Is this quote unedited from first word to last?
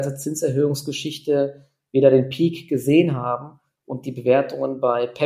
yes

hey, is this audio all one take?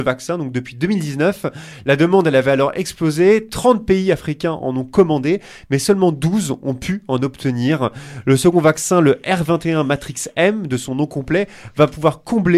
yes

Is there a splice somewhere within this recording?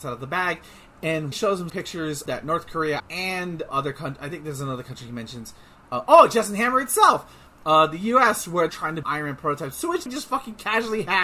yes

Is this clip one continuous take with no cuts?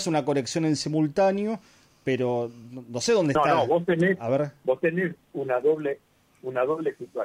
yes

